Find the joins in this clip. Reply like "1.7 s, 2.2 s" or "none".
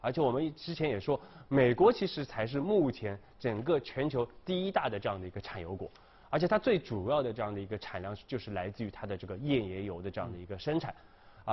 none

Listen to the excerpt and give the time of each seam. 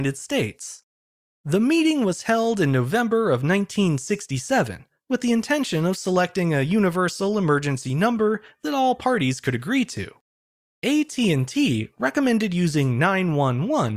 none

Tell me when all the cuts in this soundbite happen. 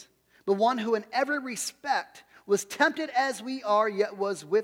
none

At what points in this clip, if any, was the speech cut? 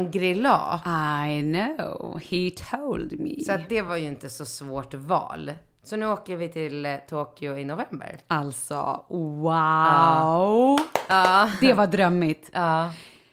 none

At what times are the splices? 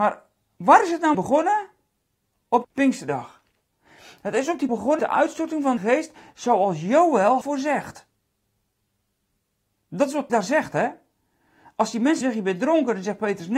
1.1 s, 2.6 s, 4.7 s, 5.0 s, 5.8 s, 7.4 s, 10.3 s, 12.2 s

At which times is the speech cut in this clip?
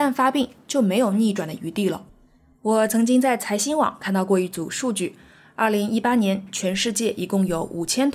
none

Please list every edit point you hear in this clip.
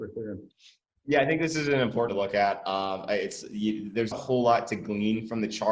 2.1 s, 4.1 s

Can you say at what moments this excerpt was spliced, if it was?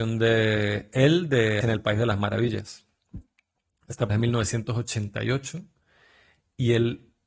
1.6 s, 4.1 s

